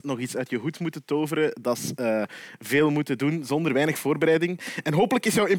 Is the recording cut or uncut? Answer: uncut